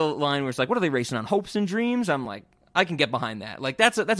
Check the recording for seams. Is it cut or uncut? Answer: uncut